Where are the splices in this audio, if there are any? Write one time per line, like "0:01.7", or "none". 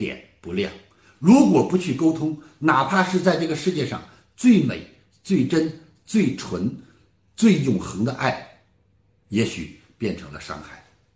none